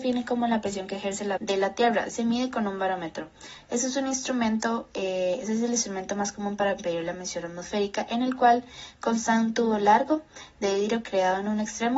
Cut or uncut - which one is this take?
cut